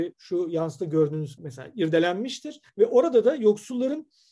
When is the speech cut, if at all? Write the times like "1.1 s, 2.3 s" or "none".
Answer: 1.4 s, 2.7 s